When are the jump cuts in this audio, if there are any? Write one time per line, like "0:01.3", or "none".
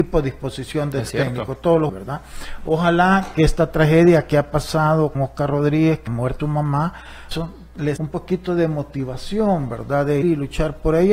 0:01.9
0:05.1
0:06.1
0:06.4
0:07.3
0:08.0
0:10.2

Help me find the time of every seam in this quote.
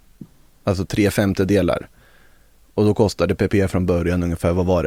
none

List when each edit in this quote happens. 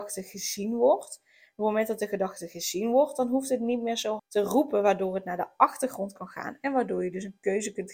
0:04.2

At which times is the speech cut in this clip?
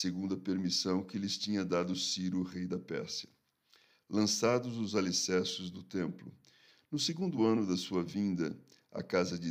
none

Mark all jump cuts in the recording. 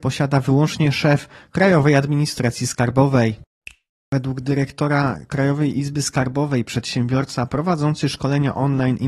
none

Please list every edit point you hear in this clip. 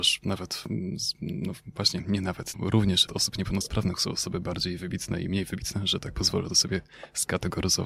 0:02.5
0:03.1

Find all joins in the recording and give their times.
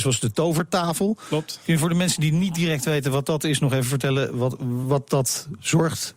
none

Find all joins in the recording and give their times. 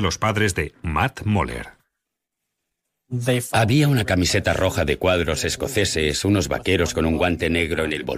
none

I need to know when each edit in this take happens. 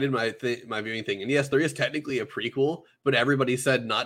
none

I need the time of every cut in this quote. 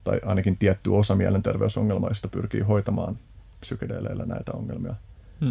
none

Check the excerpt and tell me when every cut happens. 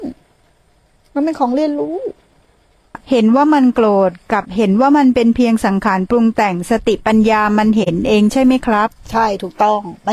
0:03.0

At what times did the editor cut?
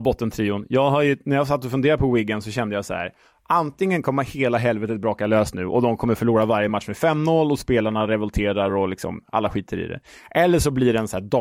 none

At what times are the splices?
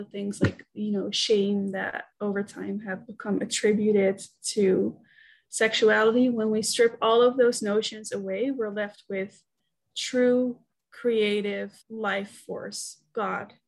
0:11.8

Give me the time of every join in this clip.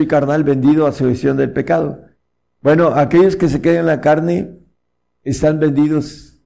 none

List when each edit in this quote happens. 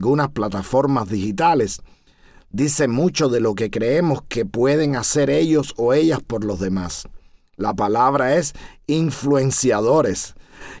none

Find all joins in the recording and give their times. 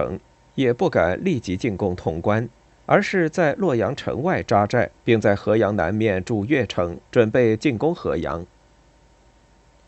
0:02.7
0:04.9
0:07.0

